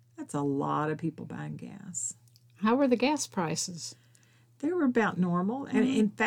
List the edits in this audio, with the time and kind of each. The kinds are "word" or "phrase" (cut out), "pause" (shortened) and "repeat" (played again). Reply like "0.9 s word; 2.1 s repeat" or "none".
none